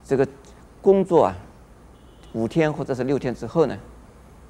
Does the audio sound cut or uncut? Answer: uncut